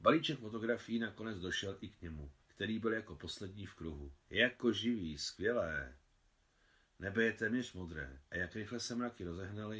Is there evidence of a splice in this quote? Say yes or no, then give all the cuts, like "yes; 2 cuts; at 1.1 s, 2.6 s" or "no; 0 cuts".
yes; 3 cuts; at 2.4 s, 4.2 s, 8.3 s